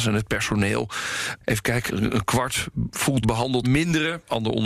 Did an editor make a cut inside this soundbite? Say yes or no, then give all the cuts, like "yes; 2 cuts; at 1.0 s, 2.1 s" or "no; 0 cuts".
yes; 3 cuts; at 1.9 s, 3.2 s, 3.6 s